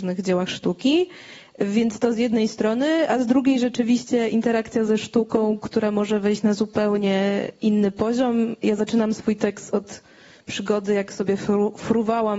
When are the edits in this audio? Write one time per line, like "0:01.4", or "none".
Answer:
none